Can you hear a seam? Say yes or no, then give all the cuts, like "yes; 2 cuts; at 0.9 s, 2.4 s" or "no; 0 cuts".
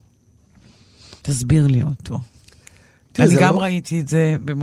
yes; 1 cut; at 1.2 s